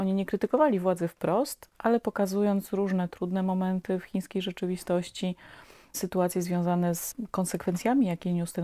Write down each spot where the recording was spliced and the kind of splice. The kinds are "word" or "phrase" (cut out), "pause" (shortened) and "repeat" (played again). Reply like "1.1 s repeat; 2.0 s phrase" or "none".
none